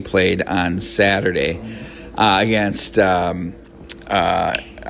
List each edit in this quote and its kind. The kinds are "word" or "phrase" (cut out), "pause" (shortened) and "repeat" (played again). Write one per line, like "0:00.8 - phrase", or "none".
none